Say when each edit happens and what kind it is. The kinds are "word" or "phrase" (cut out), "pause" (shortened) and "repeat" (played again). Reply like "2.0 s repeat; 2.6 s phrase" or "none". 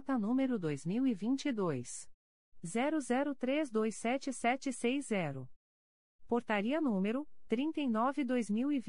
none

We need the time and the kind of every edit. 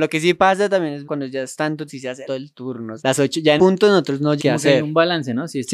1.0 s word; 1.9 s word; 2.3 s word; 3.0 s word; 3.6 s word; 4.4 s word

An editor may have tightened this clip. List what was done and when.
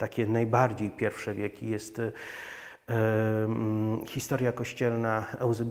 none

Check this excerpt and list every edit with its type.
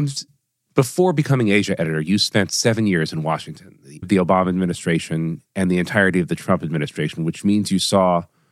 4.0 s word

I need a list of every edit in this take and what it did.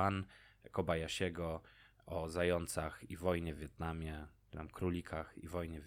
none

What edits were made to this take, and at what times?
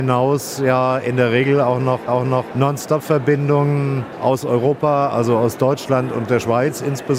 2.1 s repeat

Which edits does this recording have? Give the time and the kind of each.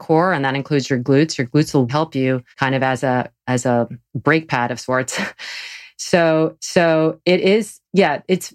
1.9 s word; 2.5 s pause; 4.1 s pause; 6.6 s repeat

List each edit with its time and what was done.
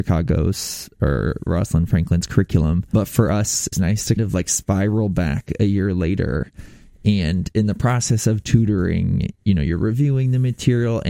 1.5 s word; 3.7 s word; 4.2 s word

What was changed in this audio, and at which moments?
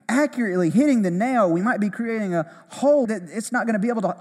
3.0 s word

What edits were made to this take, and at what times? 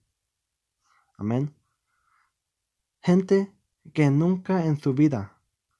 none

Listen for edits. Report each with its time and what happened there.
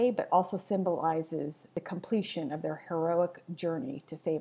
none

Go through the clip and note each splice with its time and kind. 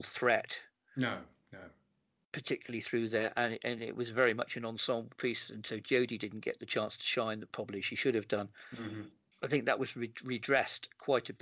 none

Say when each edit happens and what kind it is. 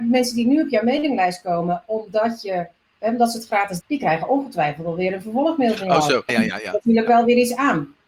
3.8 s word; 6.3 s word

